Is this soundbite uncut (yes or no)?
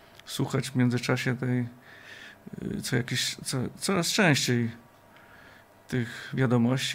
yes